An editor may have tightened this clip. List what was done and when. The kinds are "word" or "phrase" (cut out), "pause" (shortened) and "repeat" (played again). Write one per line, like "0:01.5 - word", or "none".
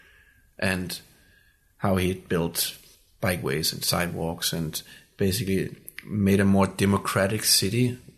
none